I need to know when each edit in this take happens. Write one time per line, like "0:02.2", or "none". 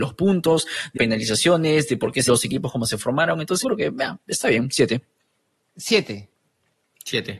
0:01.0
0:02.3
0:03.6